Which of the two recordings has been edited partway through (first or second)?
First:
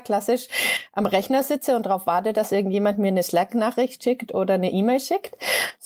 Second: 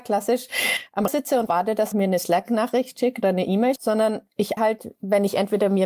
second